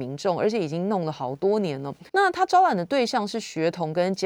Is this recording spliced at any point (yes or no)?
yes